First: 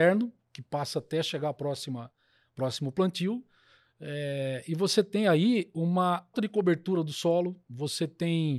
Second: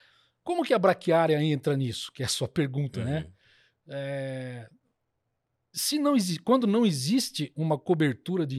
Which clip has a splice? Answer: first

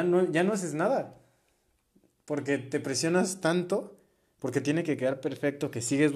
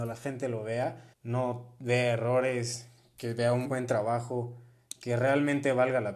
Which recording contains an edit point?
second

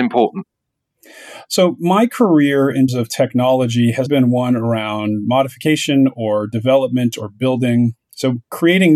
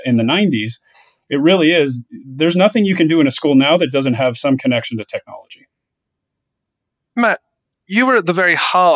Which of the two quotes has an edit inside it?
first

